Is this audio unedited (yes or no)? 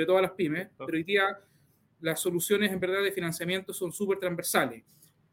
yes